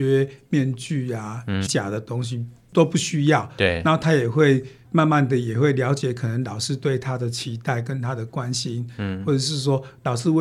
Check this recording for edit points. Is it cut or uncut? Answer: cut